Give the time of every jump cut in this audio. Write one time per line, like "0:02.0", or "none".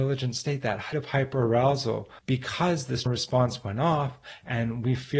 0:00.9
0:02.2
0:03.1